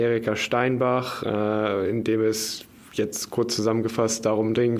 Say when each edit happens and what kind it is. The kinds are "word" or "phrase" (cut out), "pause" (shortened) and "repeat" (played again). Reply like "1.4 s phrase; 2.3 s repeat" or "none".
none